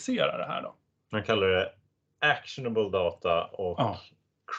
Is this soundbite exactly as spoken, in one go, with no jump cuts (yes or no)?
yes